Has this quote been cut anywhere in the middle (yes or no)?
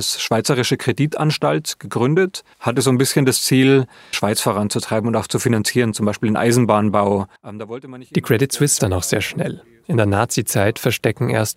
yes